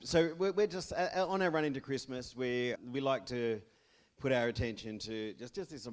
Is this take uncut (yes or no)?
no